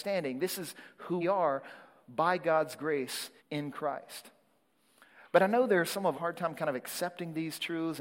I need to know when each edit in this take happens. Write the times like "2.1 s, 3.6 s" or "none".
1.2 s, 3.4 s, 6.1 s